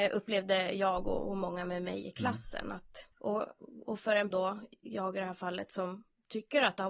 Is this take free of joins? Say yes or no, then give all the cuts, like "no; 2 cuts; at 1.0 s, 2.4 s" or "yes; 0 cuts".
no; 2 cuts; at 3.1 s, 4.3 s